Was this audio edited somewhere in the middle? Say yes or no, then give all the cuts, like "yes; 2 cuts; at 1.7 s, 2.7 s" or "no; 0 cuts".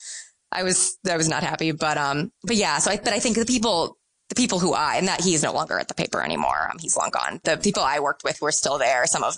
no; 0 cuts